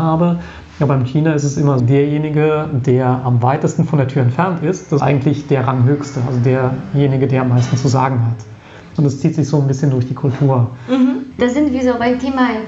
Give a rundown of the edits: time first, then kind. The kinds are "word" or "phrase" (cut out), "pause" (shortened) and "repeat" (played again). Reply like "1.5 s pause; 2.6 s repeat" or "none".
1.8 s word; 5.0 s word